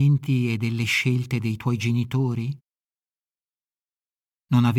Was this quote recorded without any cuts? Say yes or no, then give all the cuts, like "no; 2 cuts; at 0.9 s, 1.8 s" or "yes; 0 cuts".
yes; 0 cuts